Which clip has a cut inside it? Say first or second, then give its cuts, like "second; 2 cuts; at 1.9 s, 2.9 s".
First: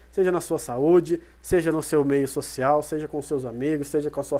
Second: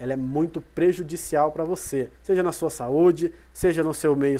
second; 1 cut; at 2.1 s